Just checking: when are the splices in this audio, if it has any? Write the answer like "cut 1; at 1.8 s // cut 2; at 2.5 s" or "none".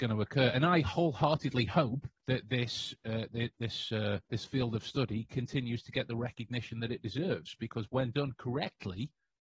cut 1; at 2.2 s // cut 2; at 4.3 s